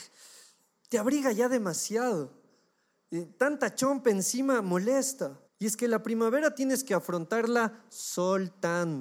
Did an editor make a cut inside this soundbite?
yes; 1 cut; at 5.5 s

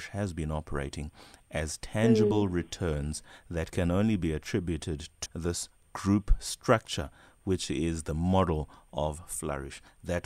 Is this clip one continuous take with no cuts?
no; 1 cut; at 5.3 s

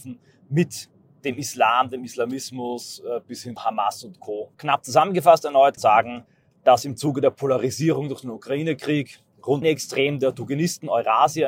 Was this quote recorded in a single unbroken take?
no; 4 cuts; at 3.6 s, 4.5 s, 5.8 s, 9.6 s

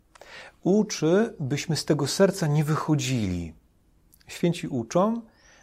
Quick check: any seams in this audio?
no; 0 cuts

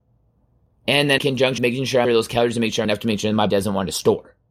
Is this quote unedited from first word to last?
no; 5 cuts; at 1.2 s, 1.6 s, 2.0 s, 2.8 s, 3.5 s

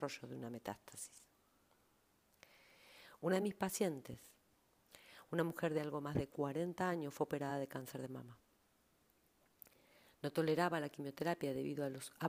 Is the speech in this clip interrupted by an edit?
no; 0 cuts

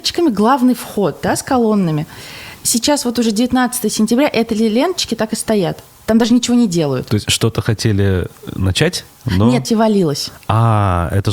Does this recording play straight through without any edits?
no; 1 cut; at 9.6 s

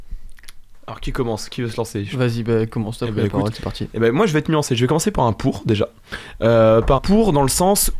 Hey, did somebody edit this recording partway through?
yes; 1 cut; at 7.0 s

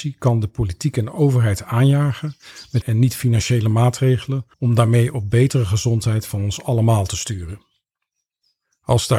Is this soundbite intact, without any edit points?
no; 2 cuts; at 2.8 s, 4.5 s

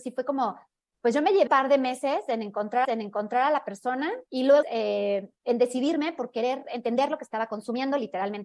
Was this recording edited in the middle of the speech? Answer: yes; 5 cuts; at 1.5 s, 2.8 s, 4.3 s, 4.6 s, 5.4 s

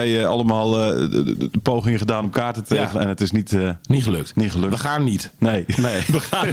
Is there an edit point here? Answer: no; 0 cuts

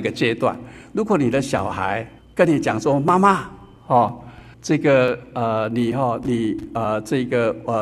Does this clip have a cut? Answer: yes; 2 cuts; at 2.2 s, 4.5 s

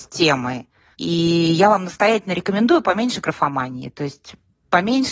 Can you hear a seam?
no; 0 cuts

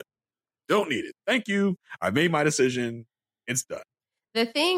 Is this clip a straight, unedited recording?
yes; 0 cuts

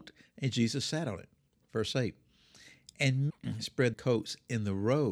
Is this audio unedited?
no; 2 cuts; at 3.3 s, 3.9 s

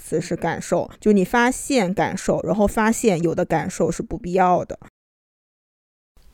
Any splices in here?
yes; 1 cut; at 1.0 s

